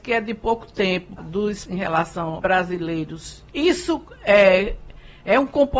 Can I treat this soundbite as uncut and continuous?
no; 4 cuts; at 1.2 s, 1.7 s, 2.4 s, 3.5 s

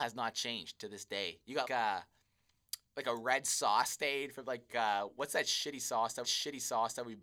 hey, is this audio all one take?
no; 3 cuts; at 1.6 s, 4.7 s, 6.2 s

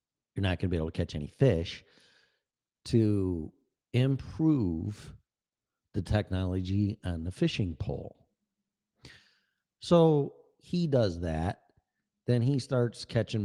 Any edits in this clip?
no; 0 cuts

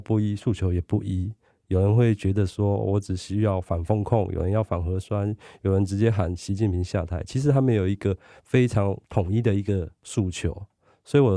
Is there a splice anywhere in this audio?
no; 0 cuts

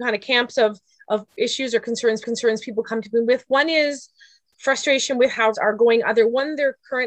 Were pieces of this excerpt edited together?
yes; 3 cuts; at 1.3 s, 2.2 s, 5.5 s

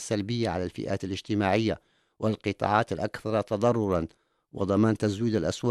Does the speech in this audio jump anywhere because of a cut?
no; 0 cuts

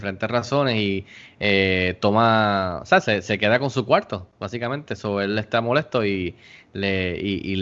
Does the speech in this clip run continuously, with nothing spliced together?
yes; 0 cuts

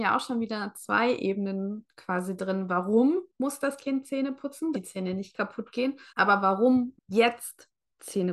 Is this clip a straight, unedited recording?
no; 3 cuts; at 4.7 s, 6.1 s, 7.0 s

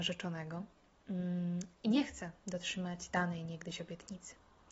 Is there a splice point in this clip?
no; 0 cuts

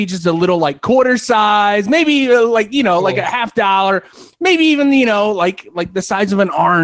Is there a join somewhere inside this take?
no; 0 cuts

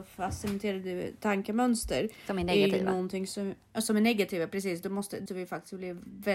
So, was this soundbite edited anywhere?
yes; 1 cut; at 5.3 s

